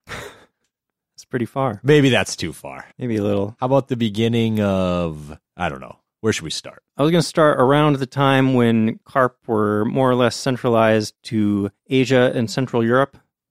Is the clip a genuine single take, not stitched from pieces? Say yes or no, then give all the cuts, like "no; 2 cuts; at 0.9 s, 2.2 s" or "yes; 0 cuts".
no; 4 cuts; at 2.9 s, 5.5 s, 6.9 s, 11.8 s